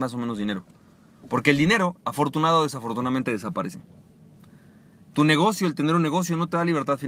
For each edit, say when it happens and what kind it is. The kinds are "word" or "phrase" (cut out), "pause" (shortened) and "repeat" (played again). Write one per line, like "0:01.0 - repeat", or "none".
none